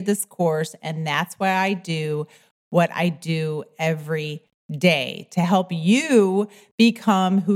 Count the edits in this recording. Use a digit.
0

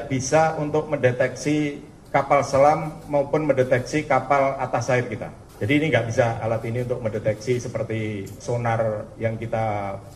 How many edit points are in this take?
2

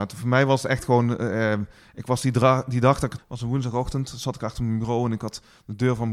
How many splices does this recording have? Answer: 1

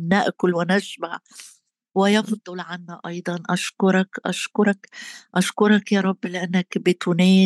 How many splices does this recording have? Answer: 0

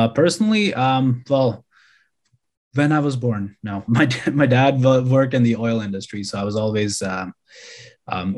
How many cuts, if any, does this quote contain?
1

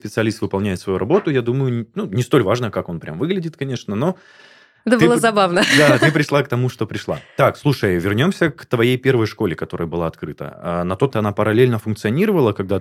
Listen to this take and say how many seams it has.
1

